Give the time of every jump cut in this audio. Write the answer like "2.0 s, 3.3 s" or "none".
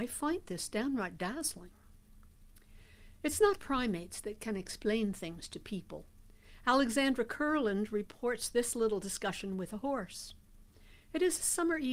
3.6 s